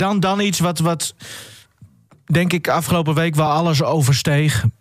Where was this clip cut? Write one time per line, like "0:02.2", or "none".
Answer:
none